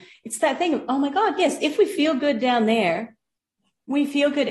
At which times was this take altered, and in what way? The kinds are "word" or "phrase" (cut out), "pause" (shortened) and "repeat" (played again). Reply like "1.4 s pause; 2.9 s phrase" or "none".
none